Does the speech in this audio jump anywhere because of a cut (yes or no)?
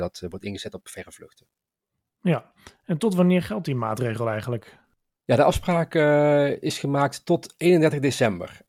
no